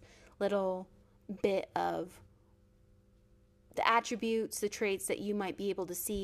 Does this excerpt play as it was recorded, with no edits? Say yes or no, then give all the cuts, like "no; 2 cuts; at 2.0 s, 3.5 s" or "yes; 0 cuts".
yes; 0 cuts